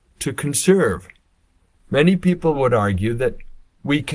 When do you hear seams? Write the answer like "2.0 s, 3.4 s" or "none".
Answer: none